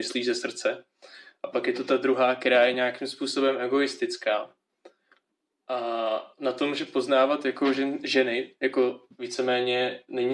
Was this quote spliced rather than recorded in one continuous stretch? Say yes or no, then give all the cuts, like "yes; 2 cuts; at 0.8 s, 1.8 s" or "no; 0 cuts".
no; 0 cuts